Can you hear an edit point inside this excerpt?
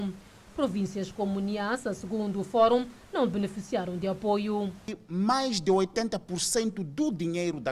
no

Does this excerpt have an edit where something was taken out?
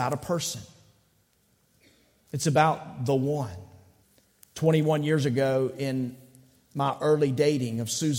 yes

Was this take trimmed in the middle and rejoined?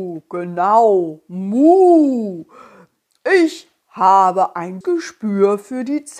yes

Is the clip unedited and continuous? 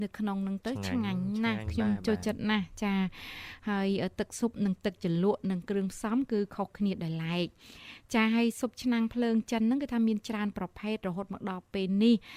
yes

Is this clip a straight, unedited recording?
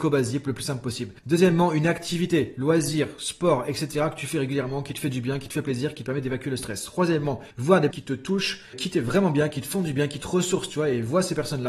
no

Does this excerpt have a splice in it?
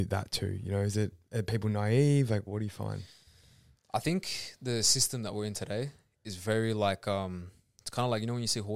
yes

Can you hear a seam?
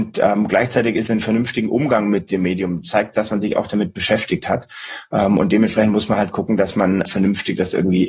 yes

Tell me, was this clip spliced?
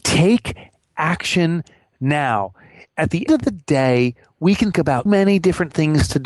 yes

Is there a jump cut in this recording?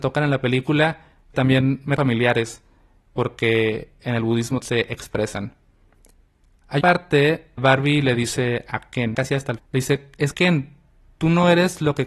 yes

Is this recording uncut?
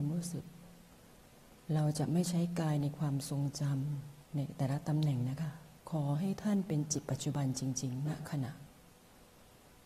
no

